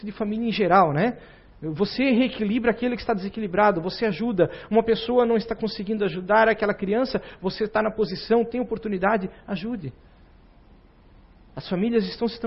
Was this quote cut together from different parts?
no; 0 cuts

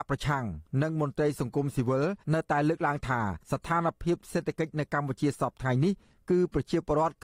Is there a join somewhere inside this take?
yes; 2 cuts; at 2.2 s, 3.4 s

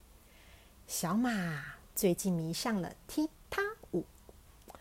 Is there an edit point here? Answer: no; 0 cuts

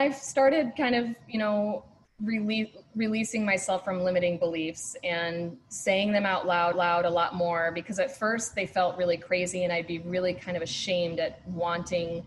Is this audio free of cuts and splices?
no; 2 cuts; at 2.1 s, 6.7 s

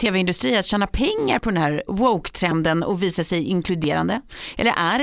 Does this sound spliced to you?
no; 0 cuts

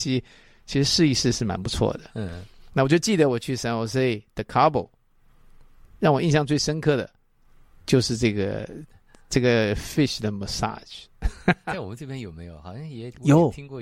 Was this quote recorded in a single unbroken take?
yes; 0 cuts

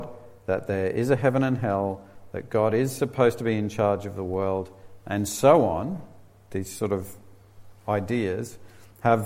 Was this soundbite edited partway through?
yes; 1 cut; at 7.8 s

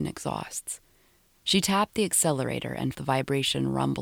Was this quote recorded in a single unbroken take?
no; 1 cut; at 2.9 s

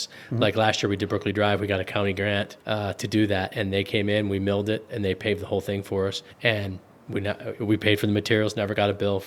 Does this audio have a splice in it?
yes; 2 cuts; at 2.6 s, 6.3 s

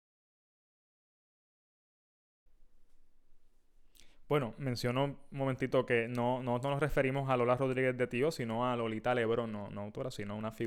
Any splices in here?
no; 0 cuts

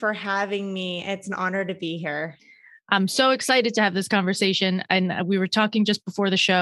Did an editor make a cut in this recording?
no; 0 cuts

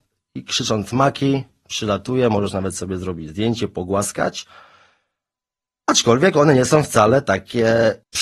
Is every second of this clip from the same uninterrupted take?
yes; 0 cuts

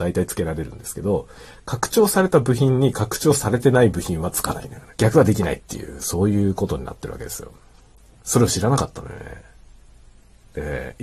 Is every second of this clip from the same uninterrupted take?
no; 1 cut; at 4.9 s

